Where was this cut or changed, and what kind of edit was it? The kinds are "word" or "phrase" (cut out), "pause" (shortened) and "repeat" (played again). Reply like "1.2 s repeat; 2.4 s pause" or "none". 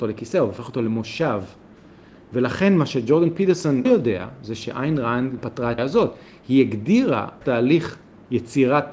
3.9 s word; 5.4 s word; 5.8 s word; 7.4 s word